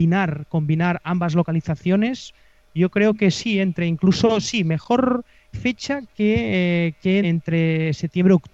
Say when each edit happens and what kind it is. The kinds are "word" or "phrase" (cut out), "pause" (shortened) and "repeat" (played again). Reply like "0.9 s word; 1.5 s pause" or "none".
5.5 s word; 7.2 s word